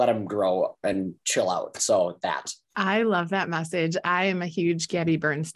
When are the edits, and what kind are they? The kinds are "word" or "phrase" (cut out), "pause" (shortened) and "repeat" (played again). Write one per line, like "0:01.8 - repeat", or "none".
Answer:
0:02.6 - pause

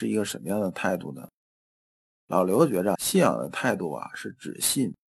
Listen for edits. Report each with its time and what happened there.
0:03.0 - word

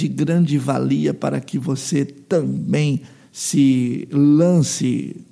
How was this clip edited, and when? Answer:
none

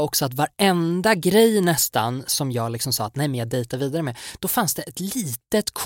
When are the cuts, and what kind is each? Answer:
none

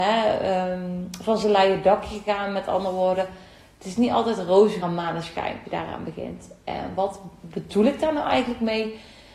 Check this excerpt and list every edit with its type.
0:04.8 - word
0:05.6 - word

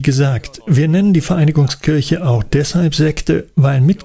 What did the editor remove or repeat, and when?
none

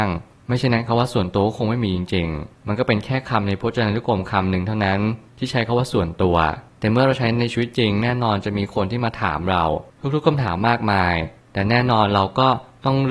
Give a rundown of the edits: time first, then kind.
none

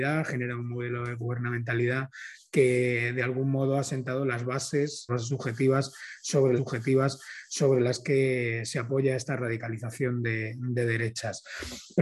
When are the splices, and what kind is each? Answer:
0:05.1 - phrase
0:06.6 - repeat

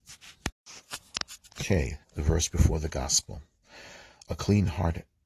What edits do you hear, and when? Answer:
0:02.0 - pause

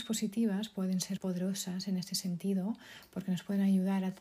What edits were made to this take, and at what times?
0:01.2 - word

